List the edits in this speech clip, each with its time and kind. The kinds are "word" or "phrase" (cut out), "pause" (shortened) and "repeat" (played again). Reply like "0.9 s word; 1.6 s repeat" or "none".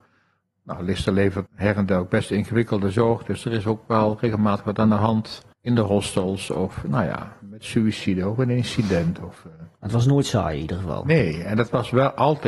1.5 s word; 5.5 s pause